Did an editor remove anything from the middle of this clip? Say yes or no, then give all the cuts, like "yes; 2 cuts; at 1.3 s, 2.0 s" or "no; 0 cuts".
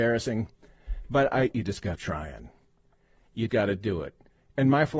yes; 3 cuts; at 1.5 s, 2.0 s, 3.5 s